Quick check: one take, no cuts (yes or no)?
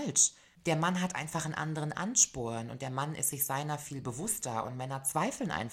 yes